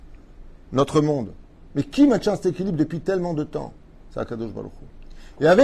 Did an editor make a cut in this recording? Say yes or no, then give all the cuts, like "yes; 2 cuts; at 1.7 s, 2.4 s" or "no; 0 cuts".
no; 0 cuts